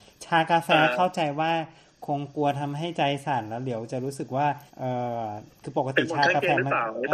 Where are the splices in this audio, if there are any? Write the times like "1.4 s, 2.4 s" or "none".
4.7 s